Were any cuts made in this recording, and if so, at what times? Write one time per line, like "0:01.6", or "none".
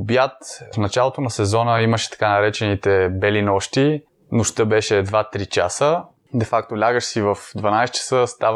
none